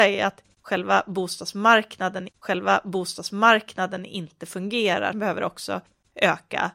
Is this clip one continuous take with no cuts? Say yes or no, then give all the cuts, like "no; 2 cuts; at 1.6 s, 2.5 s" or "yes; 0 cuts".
no; 2 cuts; at 2.3 s, 5.1 s